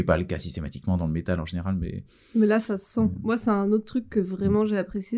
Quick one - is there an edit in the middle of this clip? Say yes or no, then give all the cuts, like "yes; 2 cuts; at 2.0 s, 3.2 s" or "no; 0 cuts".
no; 0 cuts